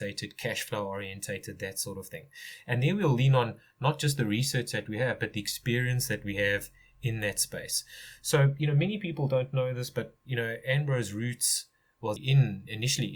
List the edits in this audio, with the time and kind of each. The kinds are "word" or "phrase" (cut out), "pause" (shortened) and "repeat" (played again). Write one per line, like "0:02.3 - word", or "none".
0:12.2 - word